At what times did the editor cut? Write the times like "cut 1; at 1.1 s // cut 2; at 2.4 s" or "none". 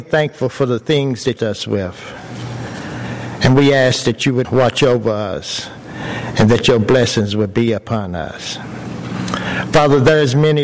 cut 1; at 1.4 s // cut 2; at 4.4 s